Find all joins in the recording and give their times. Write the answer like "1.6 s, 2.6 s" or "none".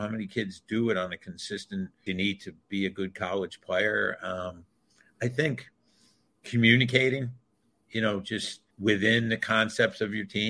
2.1 s, 8.7 s